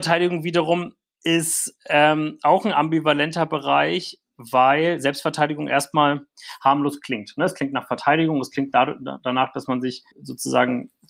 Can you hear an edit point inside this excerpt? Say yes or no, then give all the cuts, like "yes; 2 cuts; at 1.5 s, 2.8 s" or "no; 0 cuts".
yes; 1 cut; at 10.1 s